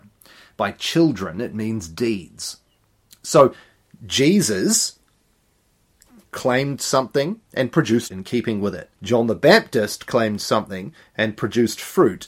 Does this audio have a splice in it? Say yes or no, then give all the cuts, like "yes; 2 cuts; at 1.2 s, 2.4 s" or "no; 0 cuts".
yes; 4 cuts; at 2.8 s, 7.4 s, 8.1 s, 9.0 s